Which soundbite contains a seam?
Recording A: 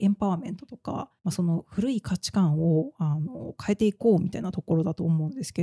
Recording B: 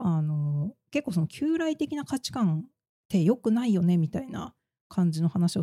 A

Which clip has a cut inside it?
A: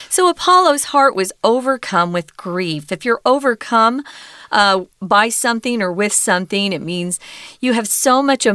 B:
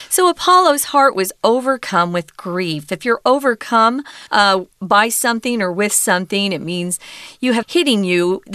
B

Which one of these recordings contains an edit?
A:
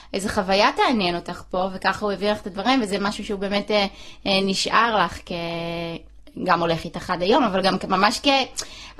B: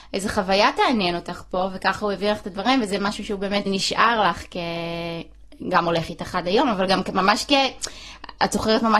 B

